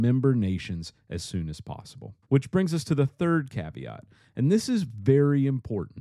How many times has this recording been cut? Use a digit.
1